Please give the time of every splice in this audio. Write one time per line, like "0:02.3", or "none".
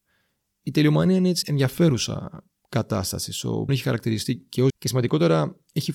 0:01.4
0:03.7
0:04.7